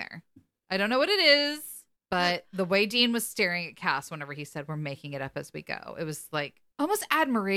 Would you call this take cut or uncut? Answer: uncut